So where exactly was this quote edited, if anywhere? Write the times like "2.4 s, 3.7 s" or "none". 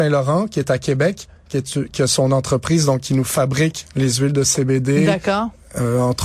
none